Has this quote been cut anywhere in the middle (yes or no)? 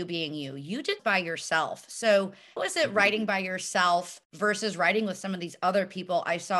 yes